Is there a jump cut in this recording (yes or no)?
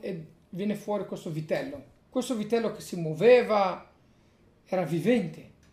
yes